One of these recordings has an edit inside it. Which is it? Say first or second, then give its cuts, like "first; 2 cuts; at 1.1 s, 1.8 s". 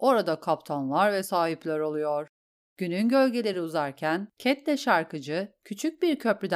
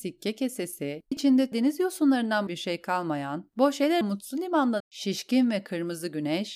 second; 5 cuts; at 1.1 s, 1.5 s, 2.5 s, 4.0 s, 4.8 s